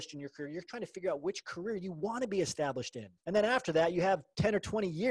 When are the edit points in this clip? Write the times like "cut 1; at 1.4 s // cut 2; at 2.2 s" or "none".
cut 1; at 3.2 s